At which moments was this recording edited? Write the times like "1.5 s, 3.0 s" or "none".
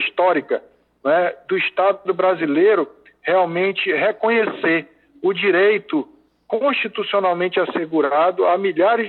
none